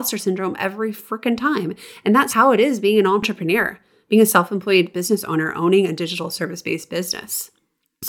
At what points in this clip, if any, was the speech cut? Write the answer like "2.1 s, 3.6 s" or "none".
2.3 s